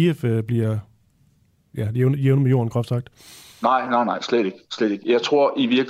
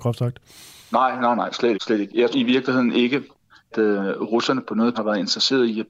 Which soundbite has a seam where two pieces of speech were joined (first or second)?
second